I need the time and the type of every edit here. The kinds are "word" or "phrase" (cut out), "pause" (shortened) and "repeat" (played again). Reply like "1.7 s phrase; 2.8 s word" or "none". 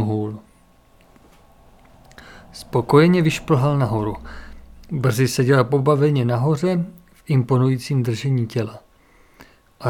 none